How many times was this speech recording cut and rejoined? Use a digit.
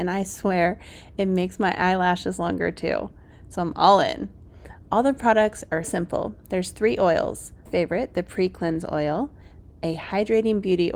2